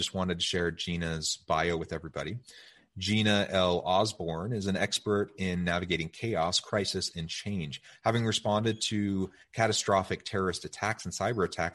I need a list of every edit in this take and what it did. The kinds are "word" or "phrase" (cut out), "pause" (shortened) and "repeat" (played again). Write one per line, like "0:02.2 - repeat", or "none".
none